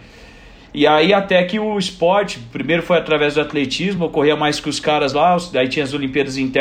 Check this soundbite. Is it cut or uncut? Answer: uncut